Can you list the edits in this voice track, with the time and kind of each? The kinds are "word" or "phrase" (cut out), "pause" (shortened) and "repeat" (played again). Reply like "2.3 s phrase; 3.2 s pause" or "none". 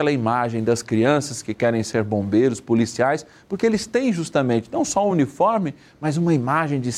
none